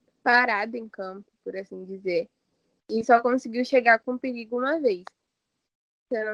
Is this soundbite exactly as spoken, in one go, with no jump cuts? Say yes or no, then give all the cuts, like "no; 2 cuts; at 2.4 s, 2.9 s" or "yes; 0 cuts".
yes; 0 cuts